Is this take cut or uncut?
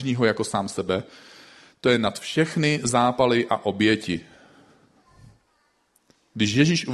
uncut